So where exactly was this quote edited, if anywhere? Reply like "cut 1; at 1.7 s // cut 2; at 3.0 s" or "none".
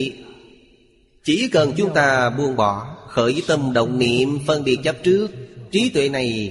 none